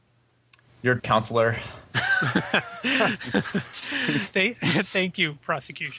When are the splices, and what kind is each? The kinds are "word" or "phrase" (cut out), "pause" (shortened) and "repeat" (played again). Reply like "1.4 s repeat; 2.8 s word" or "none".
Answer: 1.0 s word